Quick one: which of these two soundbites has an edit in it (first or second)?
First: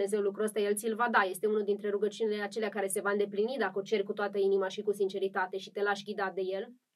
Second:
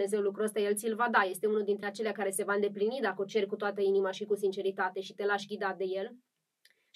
second